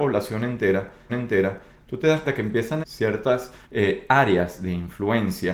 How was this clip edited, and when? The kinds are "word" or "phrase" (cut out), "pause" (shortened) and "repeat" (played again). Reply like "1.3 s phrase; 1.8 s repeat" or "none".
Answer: 1.1 s repeat; 2.2 s word; 2.8 s phrase; 3.6 s pause